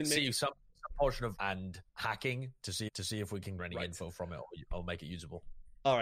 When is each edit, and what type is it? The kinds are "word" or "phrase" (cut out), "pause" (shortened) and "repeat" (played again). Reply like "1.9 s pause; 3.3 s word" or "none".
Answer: 1.4 s word; 1.9 s pause; 2.9 s repeat; 3.6 s word